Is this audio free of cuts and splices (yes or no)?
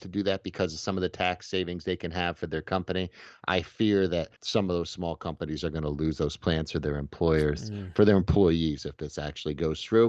no